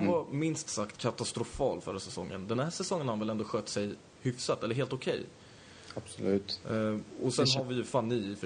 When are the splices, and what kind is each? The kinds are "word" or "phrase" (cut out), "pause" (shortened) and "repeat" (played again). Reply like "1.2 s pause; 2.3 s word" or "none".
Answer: none